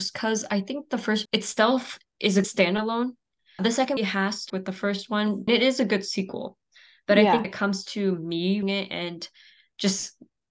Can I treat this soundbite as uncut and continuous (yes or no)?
no